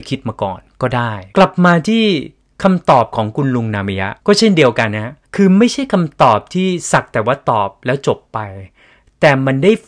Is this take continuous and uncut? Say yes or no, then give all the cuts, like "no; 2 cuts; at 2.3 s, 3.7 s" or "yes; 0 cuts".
no; 3 cuts; at 1.3 s, 4.2 s, 5.2 s